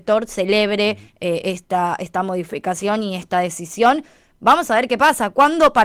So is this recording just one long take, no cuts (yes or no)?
yes